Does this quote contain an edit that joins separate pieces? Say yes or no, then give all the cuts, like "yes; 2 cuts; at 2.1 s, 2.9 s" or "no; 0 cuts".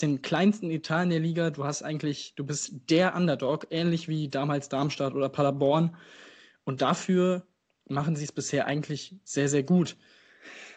no; 0 cuts